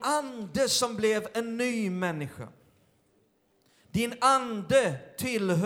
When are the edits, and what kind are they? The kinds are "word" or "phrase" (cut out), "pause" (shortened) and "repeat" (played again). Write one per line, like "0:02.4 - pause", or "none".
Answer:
none